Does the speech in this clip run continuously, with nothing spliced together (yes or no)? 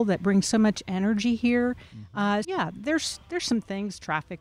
no